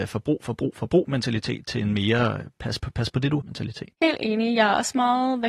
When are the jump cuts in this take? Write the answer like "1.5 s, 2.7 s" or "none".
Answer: 2.8 s, 3.4 s, 3.9 s